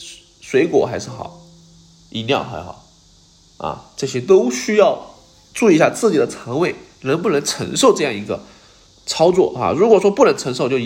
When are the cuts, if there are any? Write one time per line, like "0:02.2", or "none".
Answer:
none